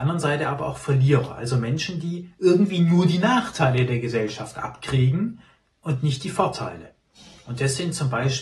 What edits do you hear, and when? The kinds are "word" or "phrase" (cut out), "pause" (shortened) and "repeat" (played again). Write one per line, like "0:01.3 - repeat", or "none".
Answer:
none